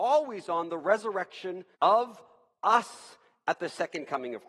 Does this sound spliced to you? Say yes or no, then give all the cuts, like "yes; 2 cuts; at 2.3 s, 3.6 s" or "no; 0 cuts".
yes; 1 cut; at 1.7 s